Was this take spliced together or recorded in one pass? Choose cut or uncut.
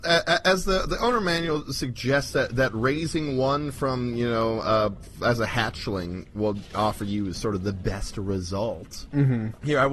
uncut